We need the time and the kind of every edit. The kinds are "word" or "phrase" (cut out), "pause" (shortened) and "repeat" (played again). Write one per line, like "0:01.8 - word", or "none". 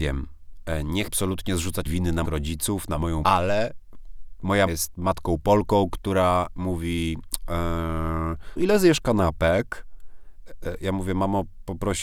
0:01.1 - word
0:01.9 - word
0:02.2 - word
0:03.2 - word
0:04.7 - word
0:08.6 - word